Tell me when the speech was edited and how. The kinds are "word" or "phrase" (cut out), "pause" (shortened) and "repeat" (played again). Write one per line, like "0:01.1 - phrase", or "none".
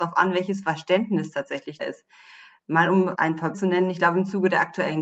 0:01.8 - word
0:03.1 - word
0:03.5 - word